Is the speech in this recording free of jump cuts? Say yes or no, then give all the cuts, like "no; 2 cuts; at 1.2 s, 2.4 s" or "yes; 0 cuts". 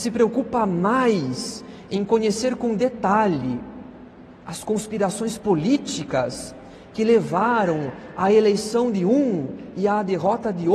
yes; 0 cuts